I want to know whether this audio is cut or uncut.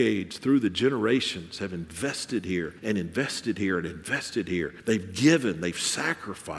cut